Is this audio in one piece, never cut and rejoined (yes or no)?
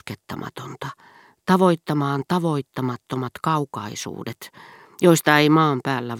yes